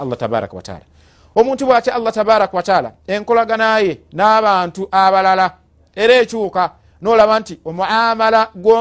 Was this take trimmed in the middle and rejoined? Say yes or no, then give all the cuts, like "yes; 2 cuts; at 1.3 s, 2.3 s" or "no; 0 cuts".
no; 0 cuts